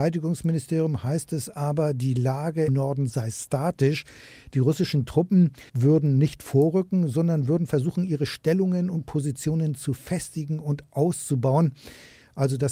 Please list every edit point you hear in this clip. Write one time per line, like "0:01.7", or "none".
0:02.7
0:05.7